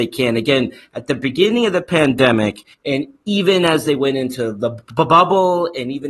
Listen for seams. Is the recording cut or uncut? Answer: cut